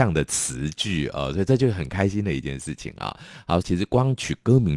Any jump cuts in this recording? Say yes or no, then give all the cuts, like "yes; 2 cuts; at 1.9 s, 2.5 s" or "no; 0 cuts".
yes; 1 cut; at 3.6 s